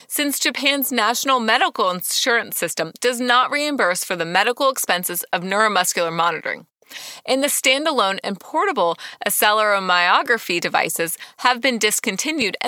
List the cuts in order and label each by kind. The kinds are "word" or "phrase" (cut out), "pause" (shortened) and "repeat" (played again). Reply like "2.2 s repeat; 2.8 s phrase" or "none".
none